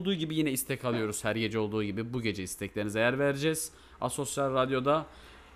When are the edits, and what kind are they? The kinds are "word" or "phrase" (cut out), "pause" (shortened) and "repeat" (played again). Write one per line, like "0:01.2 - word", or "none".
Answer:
none